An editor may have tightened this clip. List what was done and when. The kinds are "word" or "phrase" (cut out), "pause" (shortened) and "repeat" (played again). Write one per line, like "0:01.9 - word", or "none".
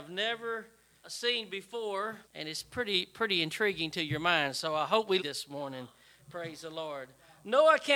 0:01.0 - word
0:02.2 - pause
0:05.2 - phrase